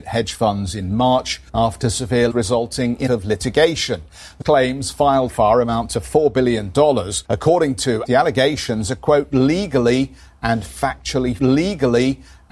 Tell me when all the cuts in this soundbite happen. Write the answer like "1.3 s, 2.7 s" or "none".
1.5 s, 2.3 s, 3.1 s, 4.4 s, 5.3 s, 7.2 s, 8.1 s, 11.4 s